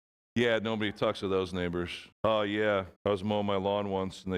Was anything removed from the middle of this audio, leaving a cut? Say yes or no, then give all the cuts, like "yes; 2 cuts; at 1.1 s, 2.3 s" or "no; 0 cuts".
yes; 2 cuts; at 2.1 s, 3.0 s